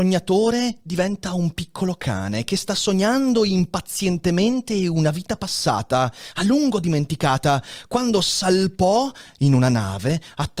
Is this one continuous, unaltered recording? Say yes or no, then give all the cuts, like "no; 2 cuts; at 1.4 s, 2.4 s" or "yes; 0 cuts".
yes; 0 cuts